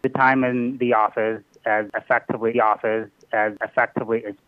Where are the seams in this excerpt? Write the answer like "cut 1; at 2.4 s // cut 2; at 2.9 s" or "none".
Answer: cut 1; at 2.5 s